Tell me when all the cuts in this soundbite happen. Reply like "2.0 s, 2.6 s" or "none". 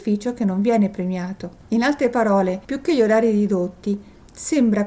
2.6 s